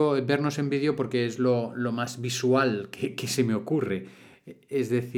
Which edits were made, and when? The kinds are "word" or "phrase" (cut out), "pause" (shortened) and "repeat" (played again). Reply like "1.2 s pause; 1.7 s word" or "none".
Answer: none